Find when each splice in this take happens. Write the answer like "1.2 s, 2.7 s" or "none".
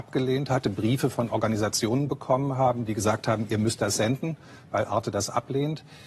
none